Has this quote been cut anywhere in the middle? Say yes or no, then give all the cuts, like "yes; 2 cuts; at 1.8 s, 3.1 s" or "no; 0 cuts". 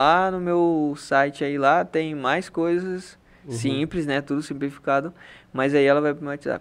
no; 0 cuts